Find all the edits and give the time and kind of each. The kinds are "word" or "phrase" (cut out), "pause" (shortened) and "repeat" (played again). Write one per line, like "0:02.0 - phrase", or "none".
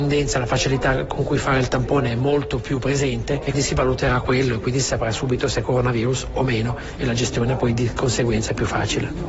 0:03.5 - word

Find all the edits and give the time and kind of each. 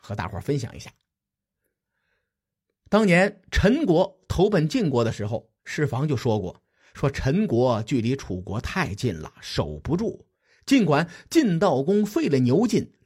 0:05.6 - pause
0:10.3 - pause

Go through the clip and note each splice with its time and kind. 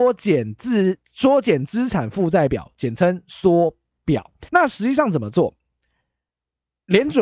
0:04.5 - pause

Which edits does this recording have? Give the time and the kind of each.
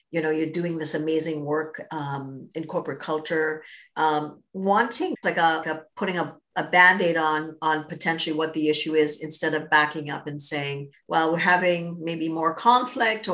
0:04.4 - phrase
0:05.2 - word
0:05.6 - word
0:10.9 - pause

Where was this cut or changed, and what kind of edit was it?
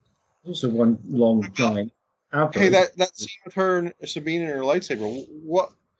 none

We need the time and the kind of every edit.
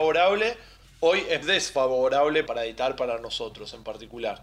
0:01.4 - word
0:02.5 - word

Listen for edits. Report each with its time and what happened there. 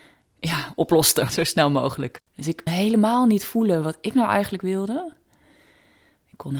0:01.3 - word
0:02.3 - pause
0:02.7 - word

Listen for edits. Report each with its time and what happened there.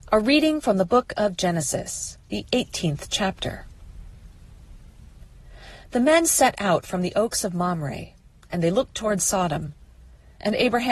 0:02.2 - pause

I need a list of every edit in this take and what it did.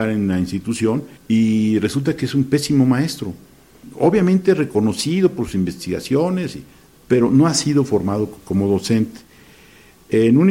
0:01.2 - pause

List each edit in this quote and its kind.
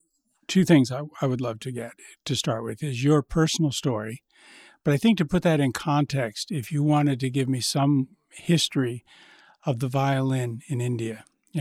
none

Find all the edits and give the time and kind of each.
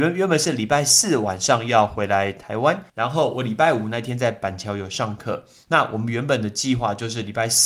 0:02.9 - pause

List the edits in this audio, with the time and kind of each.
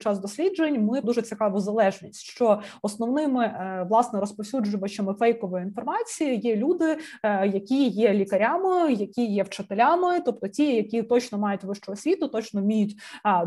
0:01.0 - word

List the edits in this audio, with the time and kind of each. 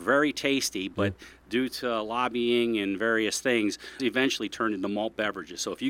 0:04.0 - word

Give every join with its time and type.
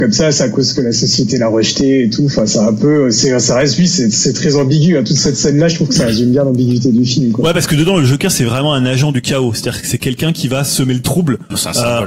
none

